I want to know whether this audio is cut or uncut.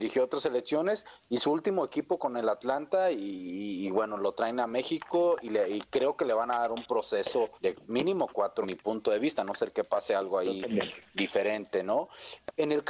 cut